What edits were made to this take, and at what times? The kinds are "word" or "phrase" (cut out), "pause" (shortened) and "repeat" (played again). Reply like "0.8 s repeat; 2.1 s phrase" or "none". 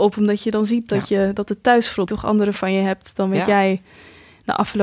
2.1 s word; 2.5 s word